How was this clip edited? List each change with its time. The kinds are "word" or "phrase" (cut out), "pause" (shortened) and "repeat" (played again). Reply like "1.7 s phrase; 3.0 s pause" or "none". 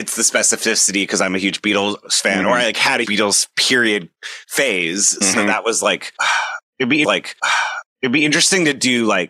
3.0 s word; 7.0 s repeat